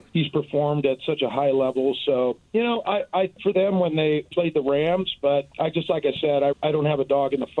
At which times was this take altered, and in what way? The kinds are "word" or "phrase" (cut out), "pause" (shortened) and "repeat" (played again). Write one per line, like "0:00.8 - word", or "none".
0:03.4 - phrase
0:04.3 - phrase
0:06.5 - word